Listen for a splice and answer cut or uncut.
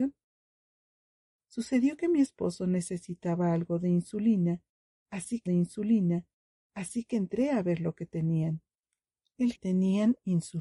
cut